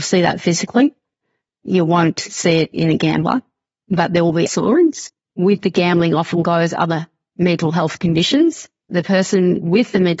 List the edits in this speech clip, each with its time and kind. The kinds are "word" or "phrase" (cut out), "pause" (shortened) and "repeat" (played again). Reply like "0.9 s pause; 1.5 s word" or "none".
4.5 s word